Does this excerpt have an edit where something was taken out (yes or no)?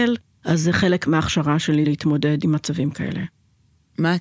no